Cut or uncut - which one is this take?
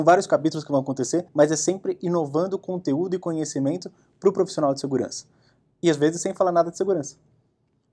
cut